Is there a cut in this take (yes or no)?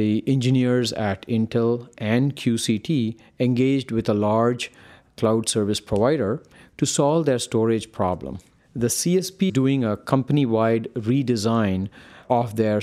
yes